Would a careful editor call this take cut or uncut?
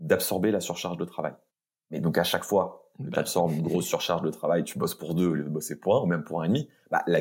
uncut